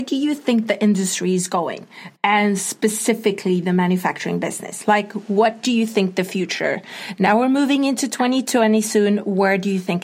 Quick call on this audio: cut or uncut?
uncut